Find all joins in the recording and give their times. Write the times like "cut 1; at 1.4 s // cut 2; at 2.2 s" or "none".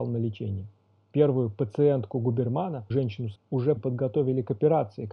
cut 1; at 2.9 s // cut 2; at 3.4 s // cut 3; at 3.8 s